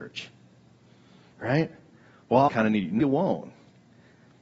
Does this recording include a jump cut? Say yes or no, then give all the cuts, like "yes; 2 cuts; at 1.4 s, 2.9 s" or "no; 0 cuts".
yes; 2 cuts; at 2.5 s, 3.0 s